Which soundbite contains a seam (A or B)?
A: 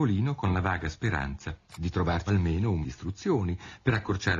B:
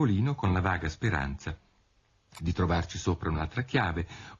A